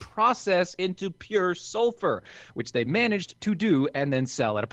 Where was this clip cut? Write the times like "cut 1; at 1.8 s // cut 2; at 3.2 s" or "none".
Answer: none